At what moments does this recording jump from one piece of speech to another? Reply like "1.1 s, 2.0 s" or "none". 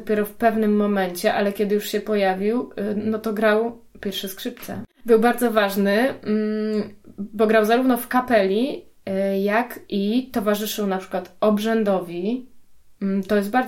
none